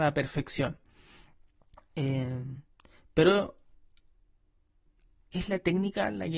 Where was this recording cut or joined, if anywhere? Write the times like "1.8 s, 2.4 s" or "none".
5.2 s